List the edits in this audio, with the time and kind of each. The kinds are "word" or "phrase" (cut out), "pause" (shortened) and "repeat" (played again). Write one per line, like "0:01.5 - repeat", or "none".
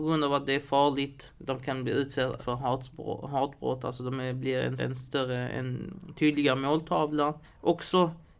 0:01.4 - pause
0:02.4 - word
0:04.8 - repeat
0:07.4 - pause